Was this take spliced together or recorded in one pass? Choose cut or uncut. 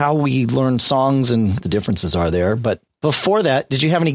cut